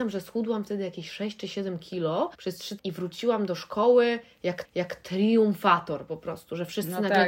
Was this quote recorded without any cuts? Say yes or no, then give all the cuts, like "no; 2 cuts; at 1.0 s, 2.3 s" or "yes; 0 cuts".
no; 3 cuts; at 2.3 s, 2.8 s, 4.6 s